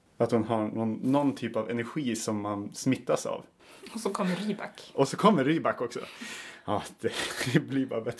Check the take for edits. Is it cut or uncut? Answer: uncut